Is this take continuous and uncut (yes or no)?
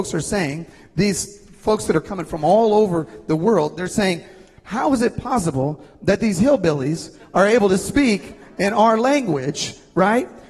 yes